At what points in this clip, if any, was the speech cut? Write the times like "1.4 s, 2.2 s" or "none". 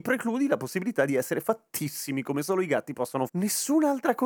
3.3 s

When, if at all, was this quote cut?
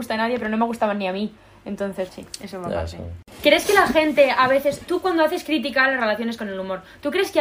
2.1 s

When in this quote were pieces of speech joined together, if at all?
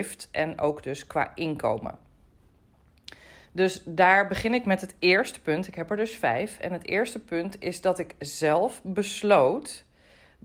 none

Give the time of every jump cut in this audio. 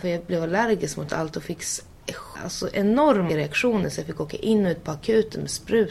2.4 s, 3.3 s

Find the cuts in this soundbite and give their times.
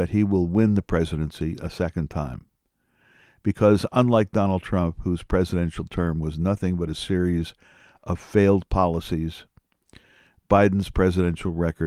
none

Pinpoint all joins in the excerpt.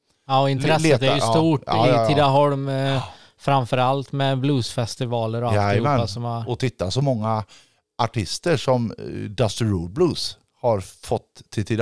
none

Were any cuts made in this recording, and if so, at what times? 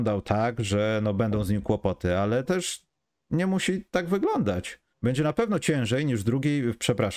2.4 s, 4.9 s

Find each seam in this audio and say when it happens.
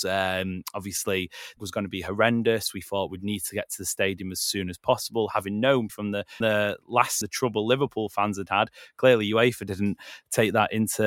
1.6 s, 5.9 s, 6.4 s, 7.2 s

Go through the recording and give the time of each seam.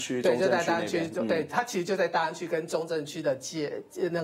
none

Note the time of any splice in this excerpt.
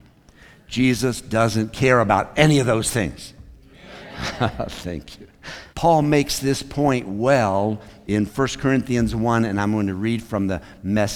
5.7 s

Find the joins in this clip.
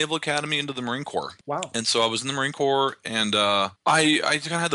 1.4 s, 3.8 s

